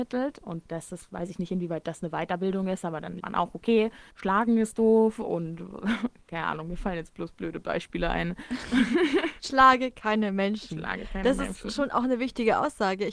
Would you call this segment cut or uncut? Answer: cut